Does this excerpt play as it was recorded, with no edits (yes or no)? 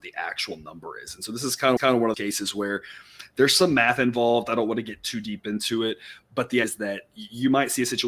no